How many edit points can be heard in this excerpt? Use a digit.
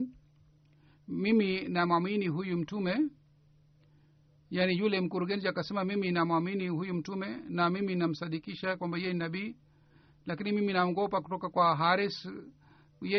0